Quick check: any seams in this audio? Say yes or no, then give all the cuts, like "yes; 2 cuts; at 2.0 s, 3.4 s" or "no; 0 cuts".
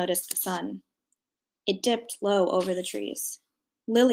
no; 0 cuts